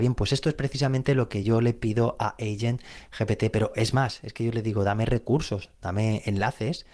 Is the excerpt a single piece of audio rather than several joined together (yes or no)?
yes